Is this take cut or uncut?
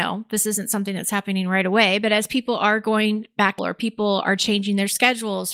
cut